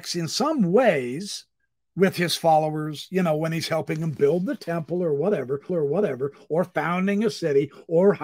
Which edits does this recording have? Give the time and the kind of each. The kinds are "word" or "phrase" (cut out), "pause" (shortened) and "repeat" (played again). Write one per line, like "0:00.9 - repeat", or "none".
0:01.6 - pause
0:05.7 - repeat

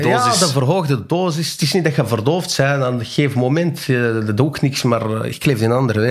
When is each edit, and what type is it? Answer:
0:04.8 - phrase

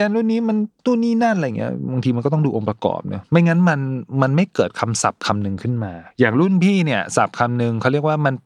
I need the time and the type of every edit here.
0:06.1 - pause

